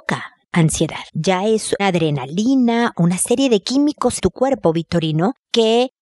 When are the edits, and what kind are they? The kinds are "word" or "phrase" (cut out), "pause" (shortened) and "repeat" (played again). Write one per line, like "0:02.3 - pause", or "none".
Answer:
0:01.1 - pause
0:01.8 - word
0:02.9 - word
0:04.2 - word